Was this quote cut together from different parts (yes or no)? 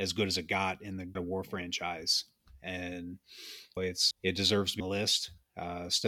yes